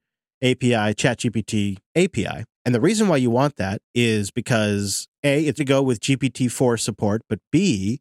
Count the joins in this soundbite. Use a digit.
2